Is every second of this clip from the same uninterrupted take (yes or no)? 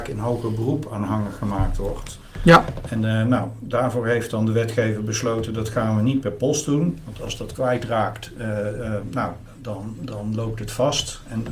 yes